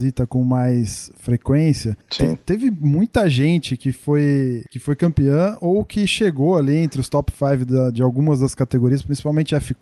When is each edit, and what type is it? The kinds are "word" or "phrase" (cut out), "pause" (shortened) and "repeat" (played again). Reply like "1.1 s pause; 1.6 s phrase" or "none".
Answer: none